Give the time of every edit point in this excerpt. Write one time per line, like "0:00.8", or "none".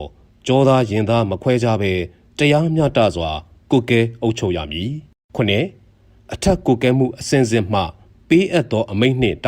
0:05.1